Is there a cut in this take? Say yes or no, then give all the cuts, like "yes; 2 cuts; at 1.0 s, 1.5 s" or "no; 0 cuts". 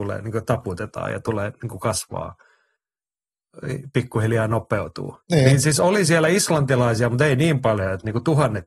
yes; 1 cut; at 5.2 s